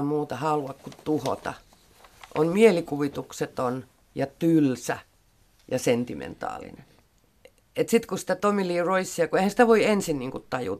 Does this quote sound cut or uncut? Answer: uncut